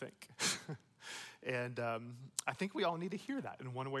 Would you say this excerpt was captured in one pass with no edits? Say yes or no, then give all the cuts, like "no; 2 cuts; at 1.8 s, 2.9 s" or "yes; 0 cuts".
yes; 0 cuts